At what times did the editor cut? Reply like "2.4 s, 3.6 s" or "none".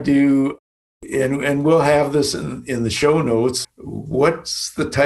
3.6 s